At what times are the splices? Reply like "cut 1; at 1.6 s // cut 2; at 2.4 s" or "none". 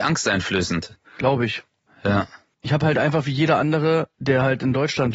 cut 1; at 1.1 s // cut 2; at 1.9 s // cut 3; at 4.1 s